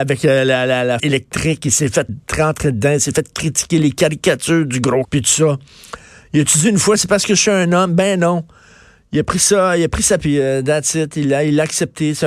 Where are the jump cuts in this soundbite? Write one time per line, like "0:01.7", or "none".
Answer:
0:01.0
0:02.1
0:05.0
0:10.2